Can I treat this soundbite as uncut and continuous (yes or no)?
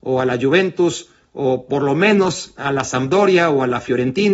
yes